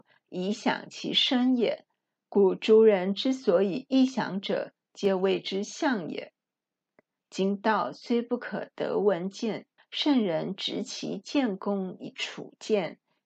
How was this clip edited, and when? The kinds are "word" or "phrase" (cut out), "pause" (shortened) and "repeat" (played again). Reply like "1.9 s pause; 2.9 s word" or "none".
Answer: 9.8 s pause